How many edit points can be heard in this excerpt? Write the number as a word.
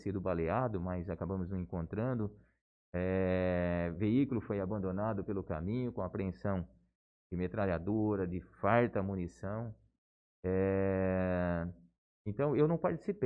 zero